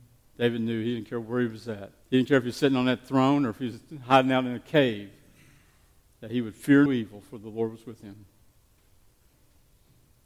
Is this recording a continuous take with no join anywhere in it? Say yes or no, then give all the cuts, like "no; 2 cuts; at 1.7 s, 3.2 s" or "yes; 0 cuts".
no; 2 cuts; at 2.0 s, 6.9 s